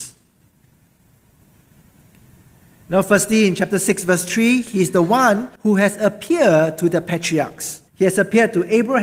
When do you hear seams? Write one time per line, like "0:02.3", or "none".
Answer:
0:05.6
0:07.9